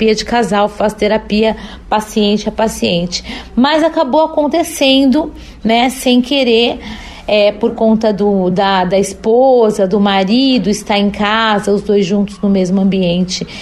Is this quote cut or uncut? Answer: uncut